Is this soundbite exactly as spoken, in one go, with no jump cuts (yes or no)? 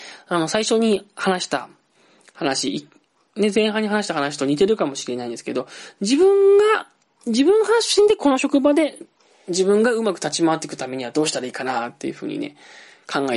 yes